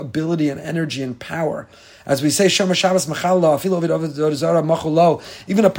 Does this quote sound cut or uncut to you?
uncut